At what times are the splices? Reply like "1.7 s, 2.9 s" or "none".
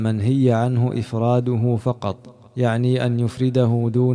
2.5 s